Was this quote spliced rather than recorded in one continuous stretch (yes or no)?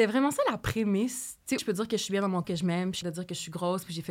yes